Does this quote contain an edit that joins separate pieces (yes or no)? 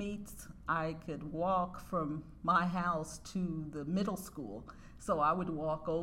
no